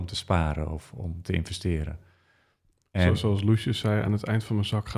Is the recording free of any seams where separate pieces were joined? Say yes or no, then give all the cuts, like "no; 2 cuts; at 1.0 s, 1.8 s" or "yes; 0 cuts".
yes; 0 cuts